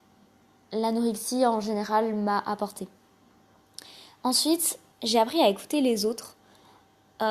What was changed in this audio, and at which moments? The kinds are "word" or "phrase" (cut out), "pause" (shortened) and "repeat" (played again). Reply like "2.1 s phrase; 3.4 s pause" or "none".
4.9 s word